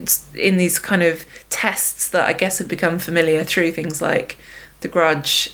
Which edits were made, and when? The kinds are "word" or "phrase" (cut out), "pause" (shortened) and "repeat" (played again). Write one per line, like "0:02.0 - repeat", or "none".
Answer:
none